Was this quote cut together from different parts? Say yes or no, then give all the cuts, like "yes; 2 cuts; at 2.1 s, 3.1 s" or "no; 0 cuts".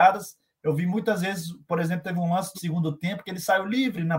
yes; 1 cut; at 2.5 s